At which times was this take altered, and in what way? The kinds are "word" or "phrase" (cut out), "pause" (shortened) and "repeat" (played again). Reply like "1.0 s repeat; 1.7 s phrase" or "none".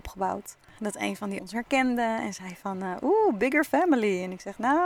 1.4 s word

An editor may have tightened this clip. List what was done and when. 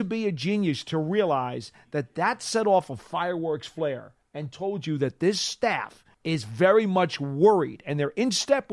6.1 s pause

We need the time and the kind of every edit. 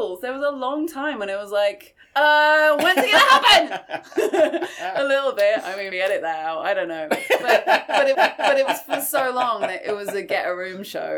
5.9 s word; 8.1 s repeat

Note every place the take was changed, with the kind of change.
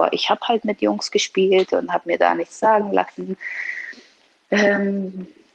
none

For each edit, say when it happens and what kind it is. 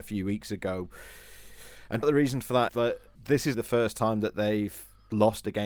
2.0 s word; 2.7 s word; 3.5 s word

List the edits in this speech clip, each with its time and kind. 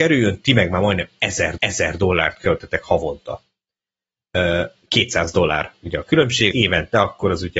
1.6 s repeat; 6.5 s word

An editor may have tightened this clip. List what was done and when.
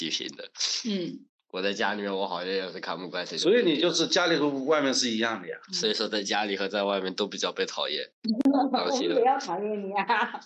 1.3 s pause; 8.1 s pause

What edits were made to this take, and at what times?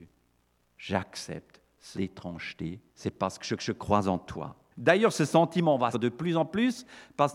1.9 s word; 2.9 s pause; 3.6 s repeat; 4.7 s pause; 5.9 s word

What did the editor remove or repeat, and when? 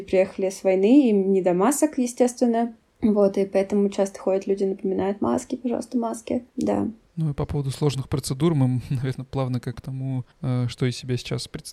6.5 s pause; 9.7 s phrase; 10.3 s pause

